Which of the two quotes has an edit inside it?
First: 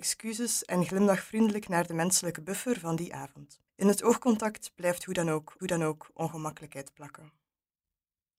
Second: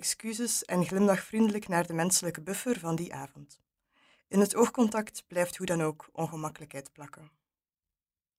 first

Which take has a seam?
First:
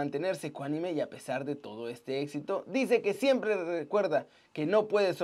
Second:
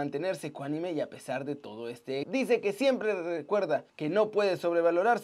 second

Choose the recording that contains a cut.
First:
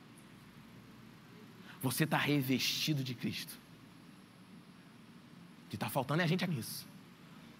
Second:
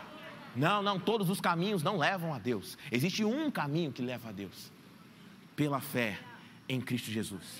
first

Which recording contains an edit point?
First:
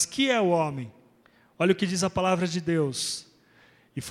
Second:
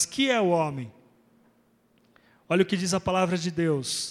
first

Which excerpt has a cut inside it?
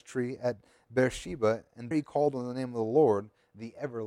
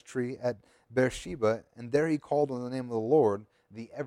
first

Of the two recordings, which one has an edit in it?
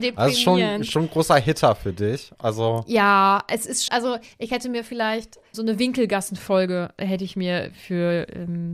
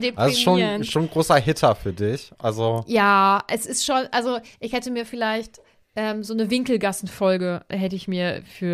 first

